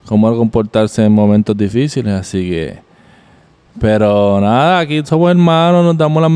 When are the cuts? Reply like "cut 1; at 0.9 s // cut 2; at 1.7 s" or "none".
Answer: none